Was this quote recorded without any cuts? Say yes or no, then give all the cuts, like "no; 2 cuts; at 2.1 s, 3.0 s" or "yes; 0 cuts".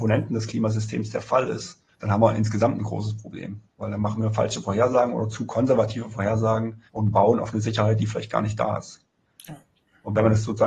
no; 3 cuts; at 1.9 s, 3.7 s, 6.9 s